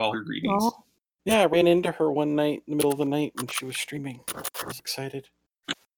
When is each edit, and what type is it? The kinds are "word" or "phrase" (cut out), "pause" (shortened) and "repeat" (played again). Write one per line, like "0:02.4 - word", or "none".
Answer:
0:04.8 - word